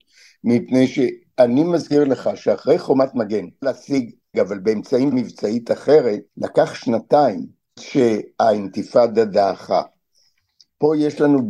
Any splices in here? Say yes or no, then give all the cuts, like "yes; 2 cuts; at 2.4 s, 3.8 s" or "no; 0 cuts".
yes; 5 cuts; at 3.6 s, 4.3 s, 5.1 s, 6.3 s, 7.8 s